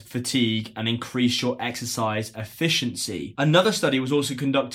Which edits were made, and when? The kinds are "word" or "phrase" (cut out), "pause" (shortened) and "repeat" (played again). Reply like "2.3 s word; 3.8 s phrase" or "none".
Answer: none